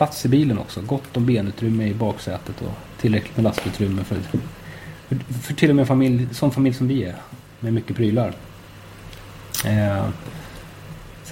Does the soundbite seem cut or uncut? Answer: uncut